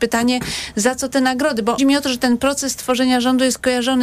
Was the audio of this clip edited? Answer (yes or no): yes